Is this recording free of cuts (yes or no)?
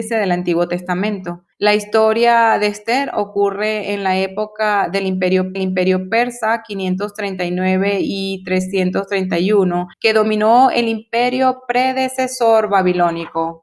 no